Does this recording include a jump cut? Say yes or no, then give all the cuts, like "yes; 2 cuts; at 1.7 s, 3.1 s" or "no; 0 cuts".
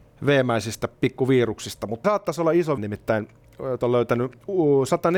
yes; 3 cuts; at 2.0 s, 2.8 s, 3.8 s